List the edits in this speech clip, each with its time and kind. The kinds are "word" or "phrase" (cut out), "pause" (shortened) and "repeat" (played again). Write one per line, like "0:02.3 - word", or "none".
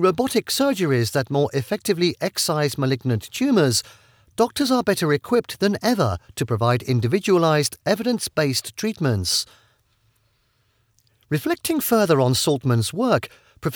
none